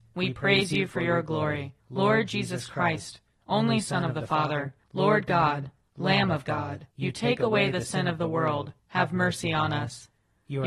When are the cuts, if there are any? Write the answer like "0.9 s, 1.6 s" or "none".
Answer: 1.8 s, 4.8 s, 6.9 s, 8.8 s

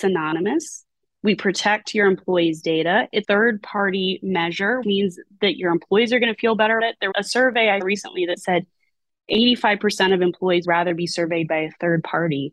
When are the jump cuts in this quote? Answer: 3.2 s, 4.8 s, 6.8 s, 7.1 s, 7.8 s, 10.6 s

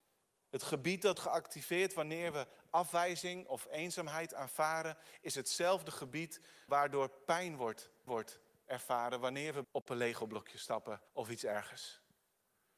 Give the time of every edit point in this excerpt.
1.1 s, 6.7 s, 8.1 s, 9.6 s, 11.1 s

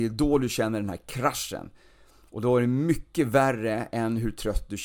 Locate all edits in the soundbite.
none

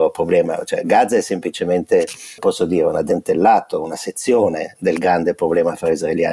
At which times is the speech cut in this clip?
2.4 s

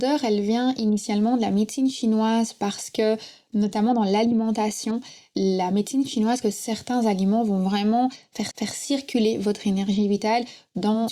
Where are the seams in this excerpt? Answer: 6.4 s, 8.5 s

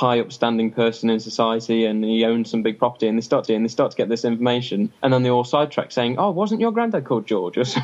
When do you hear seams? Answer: 3.4 s, 5.0 s

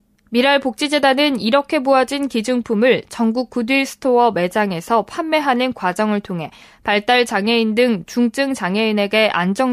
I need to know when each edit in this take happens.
none

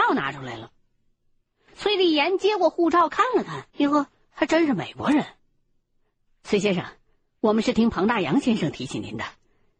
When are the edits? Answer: 3.7 s

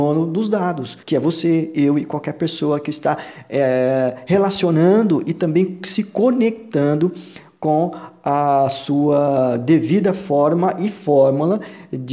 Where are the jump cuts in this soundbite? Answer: 1.0 s

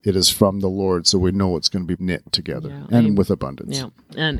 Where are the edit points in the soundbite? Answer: 2.0 s

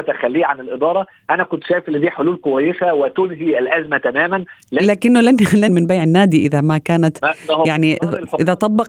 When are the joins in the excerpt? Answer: 5.7 s

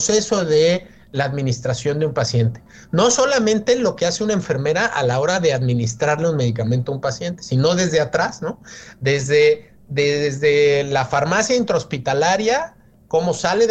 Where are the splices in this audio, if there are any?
none

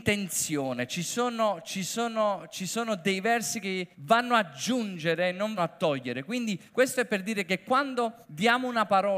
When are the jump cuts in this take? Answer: 3.9 s, 5.6 s, 6.7 s, 8.2 s

